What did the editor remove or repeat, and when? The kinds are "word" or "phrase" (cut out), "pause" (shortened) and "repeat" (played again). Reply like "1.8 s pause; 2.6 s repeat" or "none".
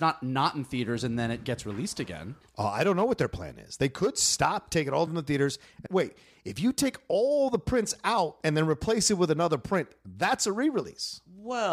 5.1 s word; 5.9 s word